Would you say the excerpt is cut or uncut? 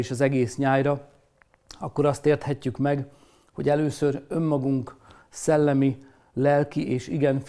uncut